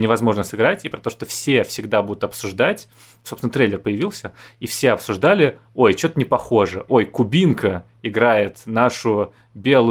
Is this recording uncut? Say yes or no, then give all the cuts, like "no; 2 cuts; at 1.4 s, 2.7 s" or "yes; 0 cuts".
yes; 0 cuts